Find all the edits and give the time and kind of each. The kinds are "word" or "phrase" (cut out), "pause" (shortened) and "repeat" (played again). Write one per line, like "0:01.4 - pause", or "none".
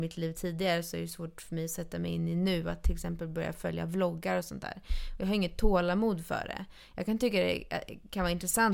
none